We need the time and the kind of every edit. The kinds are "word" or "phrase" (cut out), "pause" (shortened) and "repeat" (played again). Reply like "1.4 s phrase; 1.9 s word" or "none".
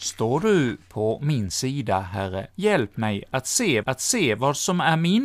2.5 s pause; 3.8 s repeat